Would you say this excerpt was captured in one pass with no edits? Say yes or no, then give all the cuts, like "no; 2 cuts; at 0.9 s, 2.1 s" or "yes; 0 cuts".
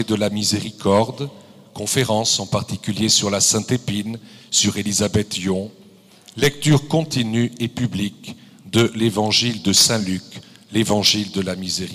yes; 0 cuts